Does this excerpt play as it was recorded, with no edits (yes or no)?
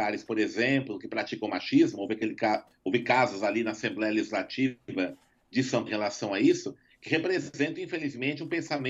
no